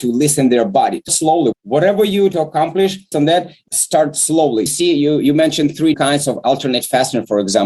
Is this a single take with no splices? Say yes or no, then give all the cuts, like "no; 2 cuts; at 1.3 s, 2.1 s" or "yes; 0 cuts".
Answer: no; 7 cuts; at 1.1 s, 1.5 s, 2.3 s, 3.1 s, 3.7 s, 4.7 s, 5.9 s